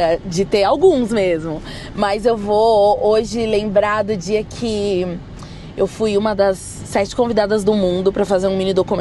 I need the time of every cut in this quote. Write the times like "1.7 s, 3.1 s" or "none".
none

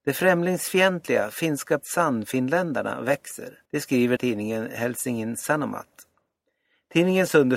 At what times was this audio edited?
1.8 s, 3.7 s, 4.2 s

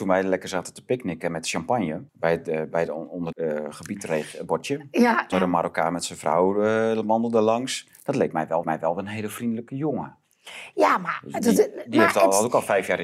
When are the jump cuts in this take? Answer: 2.1 s, 3.3 s, 5.3 s, 8.6 s

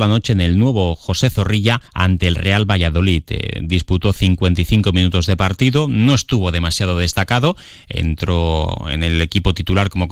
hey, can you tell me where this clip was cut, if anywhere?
1.9 s

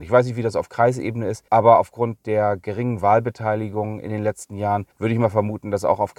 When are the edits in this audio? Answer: 1.5 s, 4.9 s

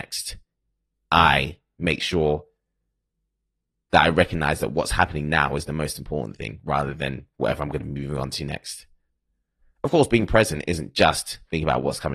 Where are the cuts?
none

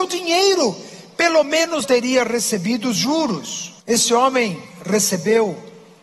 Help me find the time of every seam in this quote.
1.8 s, 3.8 s

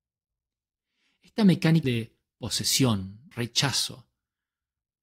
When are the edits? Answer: 1.8 s, 3.3 s

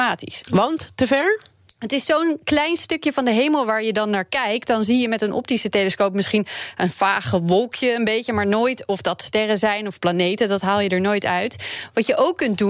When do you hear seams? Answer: none

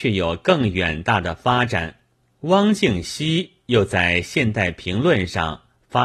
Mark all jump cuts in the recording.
2.2 s

